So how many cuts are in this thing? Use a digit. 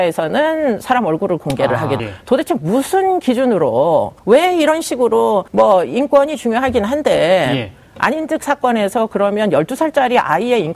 3